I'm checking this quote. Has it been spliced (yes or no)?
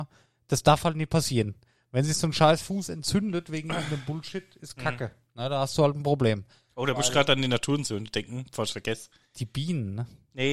no